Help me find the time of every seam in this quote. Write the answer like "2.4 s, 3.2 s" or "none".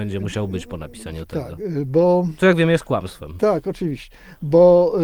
none